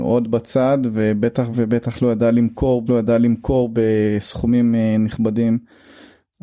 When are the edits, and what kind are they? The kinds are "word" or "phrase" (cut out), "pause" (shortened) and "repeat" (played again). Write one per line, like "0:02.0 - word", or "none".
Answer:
0:01.5 - phrase
0:02.9 - repeat

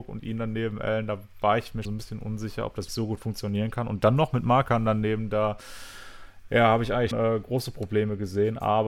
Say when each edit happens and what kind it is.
0:01.8 - word
0:02.9 - word
0:07.1 - word

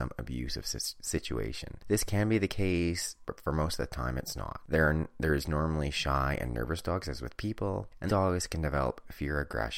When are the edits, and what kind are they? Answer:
0:08.1 - word

